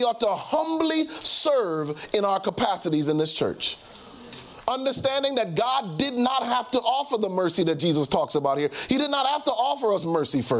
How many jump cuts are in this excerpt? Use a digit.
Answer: 0